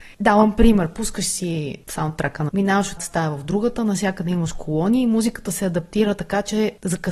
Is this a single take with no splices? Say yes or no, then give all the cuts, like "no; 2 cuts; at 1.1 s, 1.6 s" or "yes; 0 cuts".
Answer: no; 2 cuts; at 2.5 s, 3.0 s